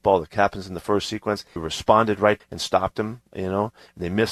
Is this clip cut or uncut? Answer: cut